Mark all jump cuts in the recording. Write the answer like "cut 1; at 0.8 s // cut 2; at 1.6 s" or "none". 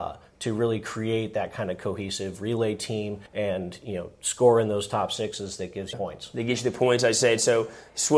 cut 1; at 3.3 s // cut 2; at 5.9 s